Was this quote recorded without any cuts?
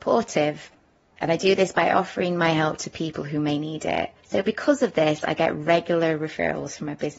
no; 1 cut; at 4.2 s

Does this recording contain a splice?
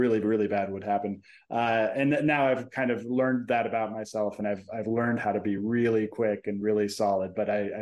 no; 0 cuts

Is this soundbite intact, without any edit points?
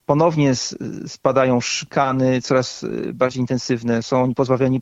yes; 0 cuts

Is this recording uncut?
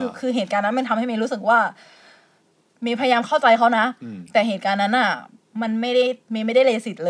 yes; 0 cuts

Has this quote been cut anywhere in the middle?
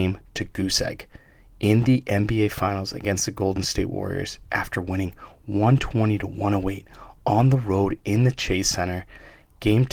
no; 0 cuts

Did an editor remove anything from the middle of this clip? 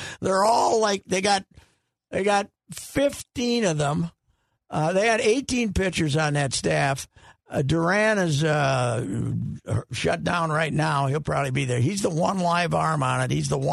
no; 0 cuts

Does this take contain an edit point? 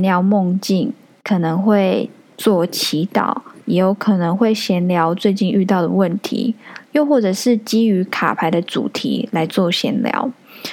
no; 0 cuts

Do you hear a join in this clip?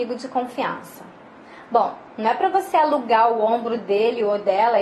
no; 0 cuts

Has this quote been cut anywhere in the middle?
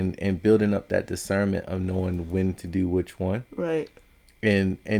no; 0 cuts

